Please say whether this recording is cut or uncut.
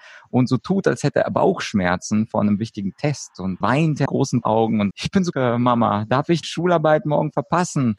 cut